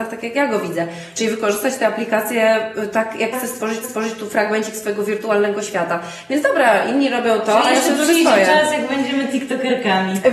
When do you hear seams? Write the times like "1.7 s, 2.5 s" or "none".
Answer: 3.3 s, 3.8 s